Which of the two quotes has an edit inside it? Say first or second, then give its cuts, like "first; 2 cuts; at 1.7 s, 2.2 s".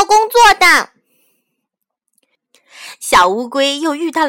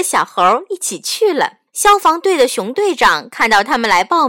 second; 1 cut; at 1.7 s